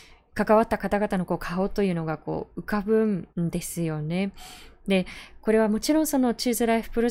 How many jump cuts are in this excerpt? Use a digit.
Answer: 1